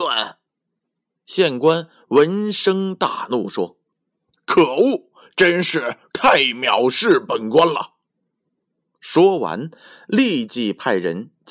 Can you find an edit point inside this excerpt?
no; 0 cuts

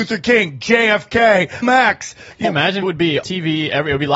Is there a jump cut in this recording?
yes; 4 cuts; at 1.6 s, 2.4 s, 2.8 s, 3.2 s

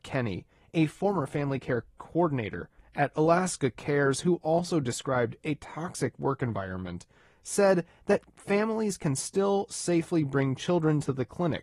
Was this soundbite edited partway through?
no; 0 cuts

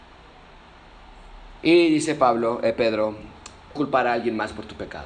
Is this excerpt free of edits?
no; 2 cuts; at 1.6 s, 3.7 s

